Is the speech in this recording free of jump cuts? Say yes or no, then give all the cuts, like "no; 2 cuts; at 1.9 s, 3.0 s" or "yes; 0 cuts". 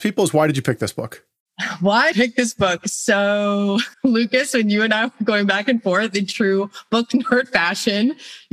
no; 2 cuts; at 2.1 s, 3.9 s